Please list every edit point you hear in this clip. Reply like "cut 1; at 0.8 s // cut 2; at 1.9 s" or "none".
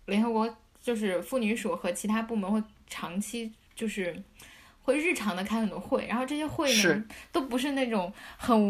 none